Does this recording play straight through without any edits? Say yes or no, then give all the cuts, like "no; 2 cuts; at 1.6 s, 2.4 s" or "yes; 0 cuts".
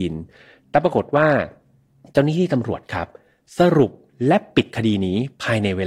yes; 0 cuts